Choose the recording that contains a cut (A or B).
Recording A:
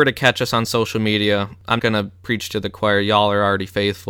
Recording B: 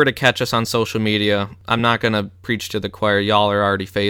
A